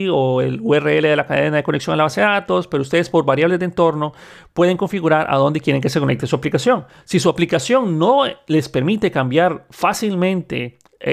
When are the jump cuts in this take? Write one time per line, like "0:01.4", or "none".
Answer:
none